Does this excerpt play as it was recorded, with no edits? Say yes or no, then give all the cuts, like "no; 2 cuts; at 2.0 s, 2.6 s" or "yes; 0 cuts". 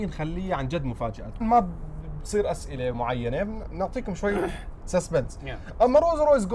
no; 2 cuts; at 1.4 s, 2.9 s